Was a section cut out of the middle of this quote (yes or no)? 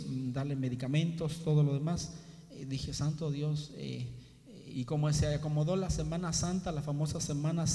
no